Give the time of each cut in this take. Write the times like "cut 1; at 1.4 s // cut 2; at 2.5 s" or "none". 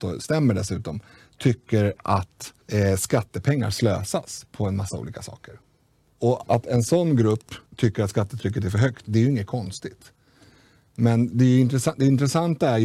cut 1; at 2.6 s // cut 2; at 6.4 s // cut 3; at 7.7 s